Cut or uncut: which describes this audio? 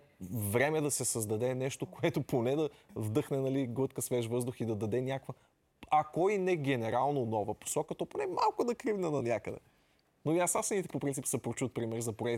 uncut